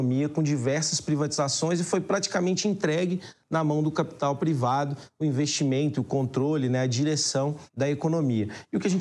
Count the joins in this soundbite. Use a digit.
1